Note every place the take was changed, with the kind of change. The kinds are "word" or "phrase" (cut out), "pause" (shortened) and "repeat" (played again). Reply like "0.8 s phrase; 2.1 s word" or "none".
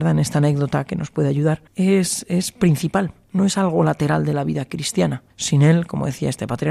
1.7 s pause; 5.3 s pause